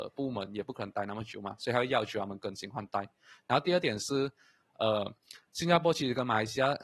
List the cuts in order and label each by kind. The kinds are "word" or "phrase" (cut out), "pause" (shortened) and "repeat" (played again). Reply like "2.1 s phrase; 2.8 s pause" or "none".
none

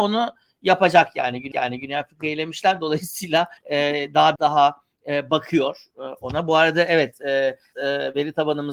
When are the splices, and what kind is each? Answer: 1.5 s repeat; 3.6 s pause; 4.4 s word; 7.7 s word

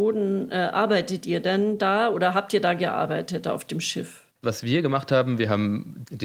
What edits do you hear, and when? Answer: 4.3 s pause

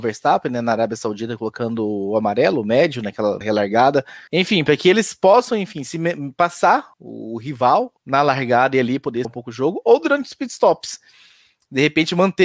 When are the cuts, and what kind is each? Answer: 3.4 s word; 4.3 s pause; 6.9 s pause; 8.0 s pause; 9.2 s phrase

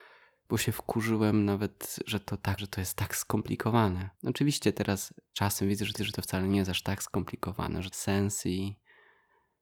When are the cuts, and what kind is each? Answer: 2.6 s word; 4.1 s pause; 5.3 s word; 6.0 s repeat; 7.9 s phrase

